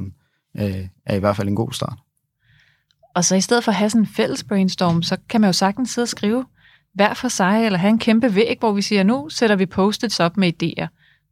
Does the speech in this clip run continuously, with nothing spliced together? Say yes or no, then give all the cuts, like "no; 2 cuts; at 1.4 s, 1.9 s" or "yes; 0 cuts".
yes; 0 cuts